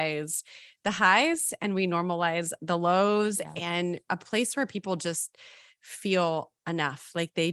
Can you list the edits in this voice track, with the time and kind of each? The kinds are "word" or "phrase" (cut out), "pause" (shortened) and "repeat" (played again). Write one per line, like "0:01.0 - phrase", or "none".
none